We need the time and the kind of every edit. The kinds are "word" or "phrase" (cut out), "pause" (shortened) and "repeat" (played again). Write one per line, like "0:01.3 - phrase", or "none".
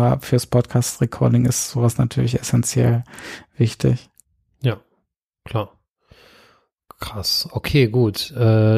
none